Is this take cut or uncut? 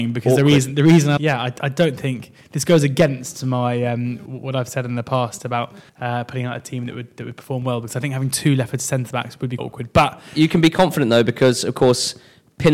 cut